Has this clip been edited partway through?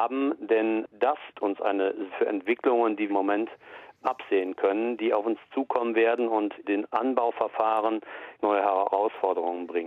yes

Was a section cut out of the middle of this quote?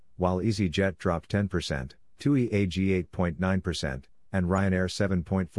no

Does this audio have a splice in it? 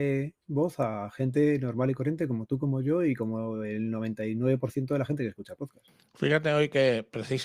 no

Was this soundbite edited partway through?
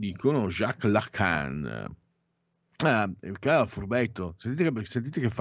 no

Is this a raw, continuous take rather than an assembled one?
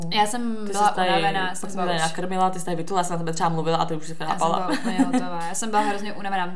yes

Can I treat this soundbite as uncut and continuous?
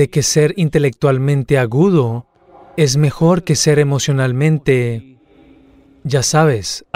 yes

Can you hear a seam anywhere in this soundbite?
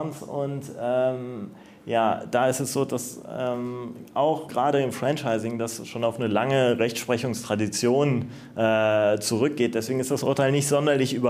yes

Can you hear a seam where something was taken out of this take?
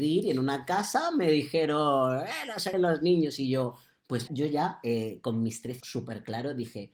yes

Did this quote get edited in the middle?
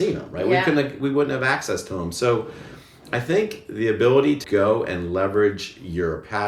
yes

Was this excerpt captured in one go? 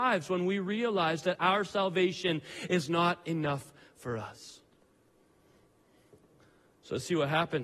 yes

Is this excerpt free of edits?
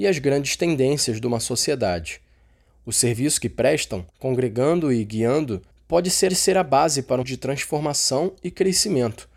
no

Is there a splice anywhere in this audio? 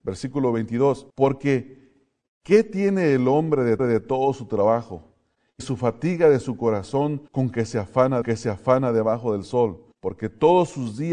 yes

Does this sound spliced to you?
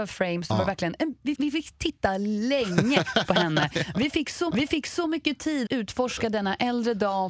yes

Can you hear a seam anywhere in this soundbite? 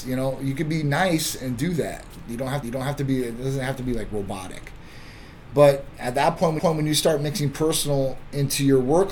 yes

